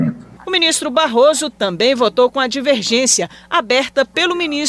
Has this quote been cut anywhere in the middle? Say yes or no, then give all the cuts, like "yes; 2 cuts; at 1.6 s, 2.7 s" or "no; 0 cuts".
no; 0 cuts